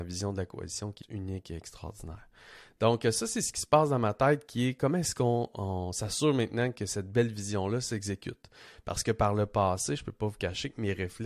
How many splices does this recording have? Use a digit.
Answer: 1